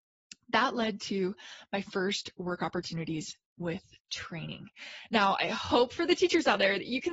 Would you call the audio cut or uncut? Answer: uncut